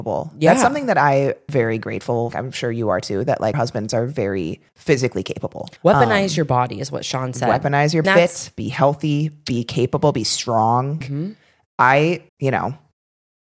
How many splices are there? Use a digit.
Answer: 8